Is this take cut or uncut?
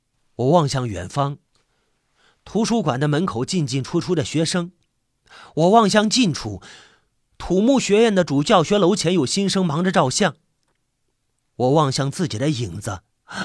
uncut